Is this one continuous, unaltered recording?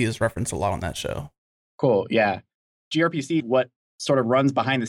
no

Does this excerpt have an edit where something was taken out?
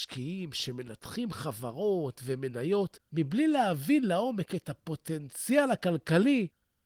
yes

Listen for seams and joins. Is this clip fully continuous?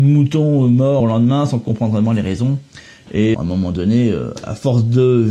no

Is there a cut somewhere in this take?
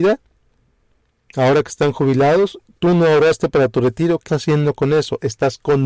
yes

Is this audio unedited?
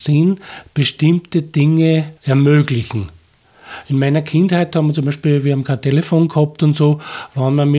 no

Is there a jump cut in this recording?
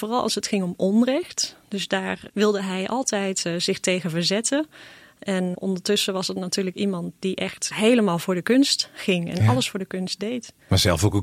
yes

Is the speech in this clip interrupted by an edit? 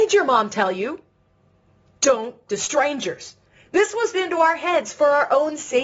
yes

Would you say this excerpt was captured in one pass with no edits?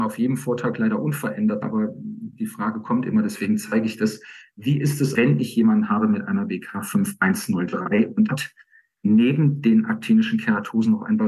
no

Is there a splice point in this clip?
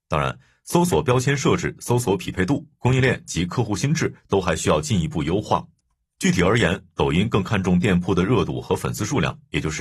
no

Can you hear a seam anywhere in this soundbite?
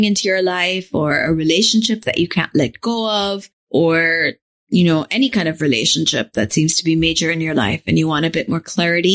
yes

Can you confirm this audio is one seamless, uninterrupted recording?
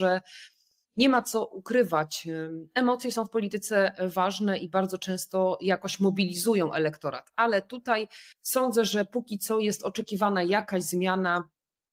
no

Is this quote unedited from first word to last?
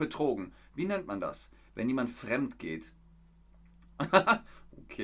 yes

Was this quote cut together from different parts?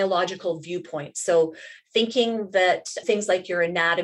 yes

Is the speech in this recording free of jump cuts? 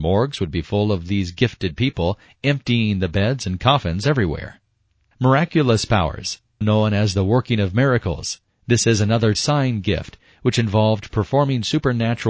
no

